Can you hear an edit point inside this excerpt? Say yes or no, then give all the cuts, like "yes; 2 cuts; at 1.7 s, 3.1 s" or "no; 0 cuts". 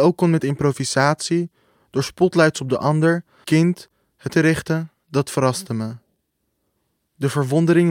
yes; 2 cuts; at 3.4 s, 4.3 s